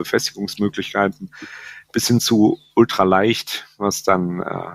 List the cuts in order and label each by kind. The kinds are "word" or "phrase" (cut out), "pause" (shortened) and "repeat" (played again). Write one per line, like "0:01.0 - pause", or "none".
none